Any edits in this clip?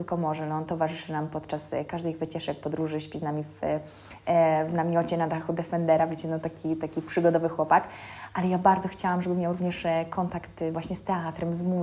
no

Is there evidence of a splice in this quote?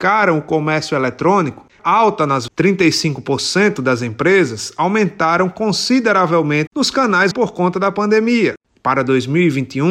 yes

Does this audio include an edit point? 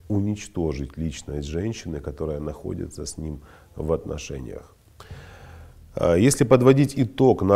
no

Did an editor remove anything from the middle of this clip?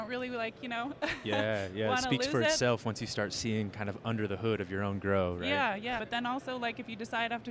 yes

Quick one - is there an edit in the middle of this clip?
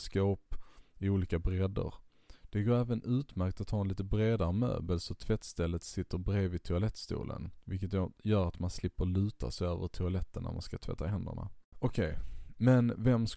yes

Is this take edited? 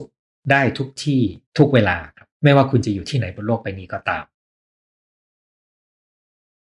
yes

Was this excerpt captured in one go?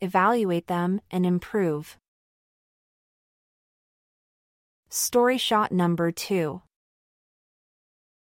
yes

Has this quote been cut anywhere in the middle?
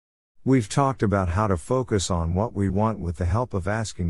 yes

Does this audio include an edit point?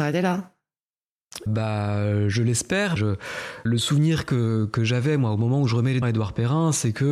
yes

